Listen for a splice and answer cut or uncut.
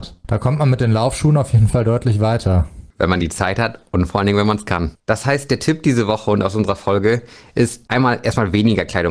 uncut